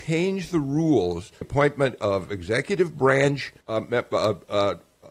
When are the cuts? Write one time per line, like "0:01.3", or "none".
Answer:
0:01.4
0:03.6